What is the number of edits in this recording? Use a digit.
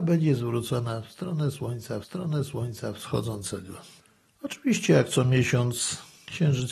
1